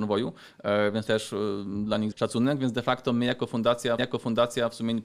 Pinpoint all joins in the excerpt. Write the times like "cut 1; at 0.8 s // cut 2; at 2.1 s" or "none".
cut 1; at 1.1 s // cut 2; at 2.1 s // cut 3; at 4.0 s